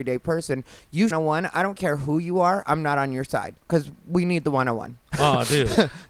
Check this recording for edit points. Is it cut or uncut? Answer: cut